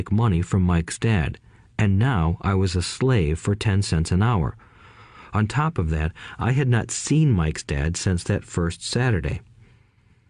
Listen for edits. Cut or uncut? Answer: uncut